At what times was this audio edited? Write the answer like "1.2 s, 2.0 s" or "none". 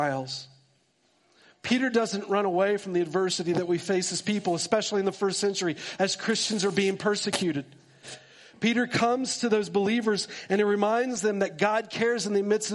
none